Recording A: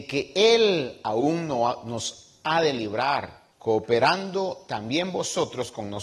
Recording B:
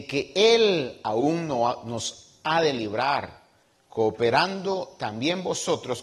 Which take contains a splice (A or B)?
A